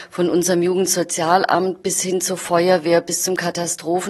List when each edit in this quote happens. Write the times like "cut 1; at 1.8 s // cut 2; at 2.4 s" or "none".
none